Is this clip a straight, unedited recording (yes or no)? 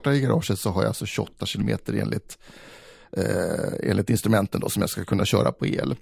yes